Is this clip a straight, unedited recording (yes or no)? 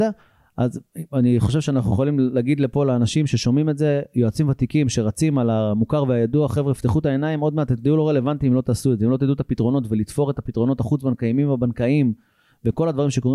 yes